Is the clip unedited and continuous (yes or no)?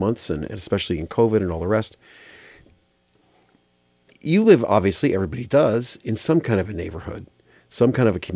yes